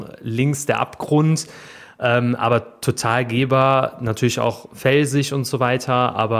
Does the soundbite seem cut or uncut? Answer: uncut